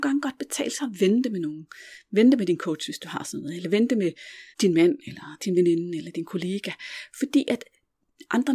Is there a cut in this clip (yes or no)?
yes